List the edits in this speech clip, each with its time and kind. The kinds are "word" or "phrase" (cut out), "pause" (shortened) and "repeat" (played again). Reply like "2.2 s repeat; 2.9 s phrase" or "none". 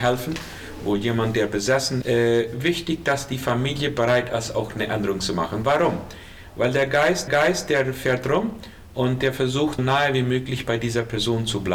2.0 s word; 7.3 s repeat; 9.8 s word